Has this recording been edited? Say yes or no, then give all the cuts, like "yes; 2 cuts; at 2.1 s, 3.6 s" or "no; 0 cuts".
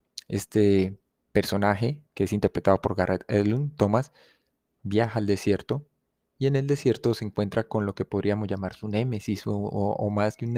yes; 1 cut; at 2.1 s